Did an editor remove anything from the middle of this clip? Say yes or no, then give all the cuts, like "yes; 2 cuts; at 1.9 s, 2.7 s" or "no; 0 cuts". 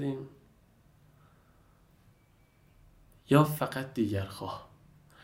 no; 0 cuts